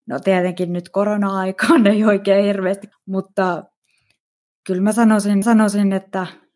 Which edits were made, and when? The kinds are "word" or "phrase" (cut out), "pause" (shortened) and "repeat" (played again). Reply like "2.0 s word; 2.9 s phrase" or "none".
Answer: 2.9 s phrase; 5.4 s repeat